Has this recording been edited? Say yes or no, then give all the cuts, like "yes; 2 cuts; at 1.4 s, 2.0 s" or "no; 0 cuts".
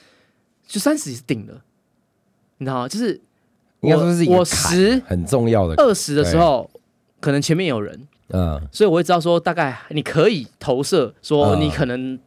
no; 0 cuts